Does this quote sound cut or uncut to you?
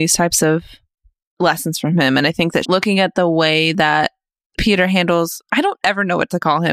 cut